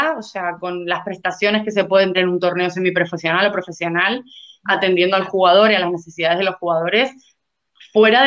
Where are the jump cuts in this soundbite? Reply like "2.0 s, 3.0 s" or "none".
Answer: 2.1 s